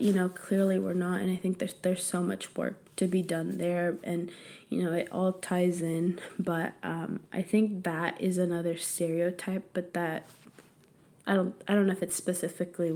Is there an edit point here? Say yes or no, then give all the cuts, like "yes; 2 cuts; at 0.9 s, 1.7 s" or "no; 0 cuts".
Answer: yes; 1 cut; at 2.9 s